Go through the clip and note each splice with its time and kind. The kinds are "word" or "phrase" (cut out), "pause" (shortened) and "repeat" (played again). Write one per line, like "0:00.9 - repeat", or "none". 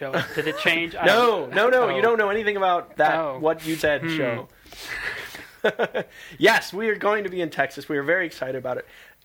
0:03.8 - word
0:05.6 - pause

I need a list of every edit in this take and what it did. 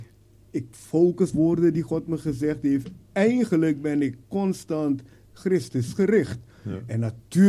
0:01.3 - word

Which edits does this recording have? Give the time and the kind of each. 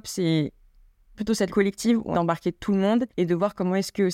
0:01.1 - word
0:01.5 - word
0:02.1 - word
0:03.1 - pause

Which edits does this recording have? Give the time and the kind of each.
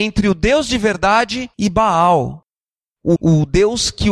0:01.5 - pause
0:03.2 - word

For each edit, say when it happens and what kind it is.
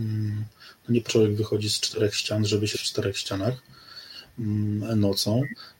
0:01.1 - word
0:02.7 - word

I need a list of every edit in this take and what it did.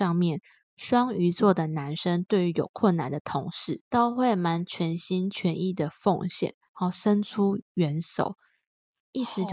0:03.8 - pause

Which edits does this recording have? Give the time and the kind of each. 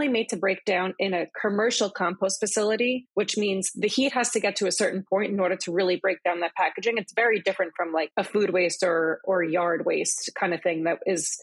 none

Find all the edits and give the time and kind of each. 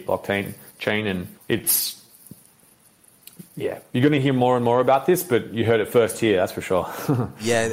0:01.4 - pause

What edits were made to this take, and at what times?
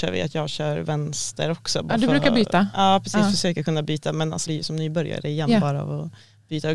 0:04.5 - word

